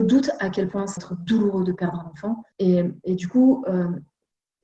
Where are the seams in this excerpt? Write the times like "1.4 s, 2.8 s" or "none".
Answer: 1.0 s, 2.5 s